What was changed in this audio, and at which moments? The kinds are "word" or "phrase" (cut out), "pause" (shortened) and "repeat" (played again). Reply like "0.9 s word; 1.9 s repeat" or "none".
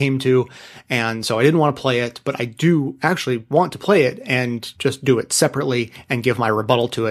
4.7 s pause